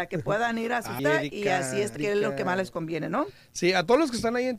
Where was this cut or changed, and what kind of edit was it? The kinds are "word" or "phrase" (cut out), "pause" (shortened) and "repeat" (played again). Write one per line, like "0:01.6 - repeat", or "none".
0:01.0 - word
0:02.0 - word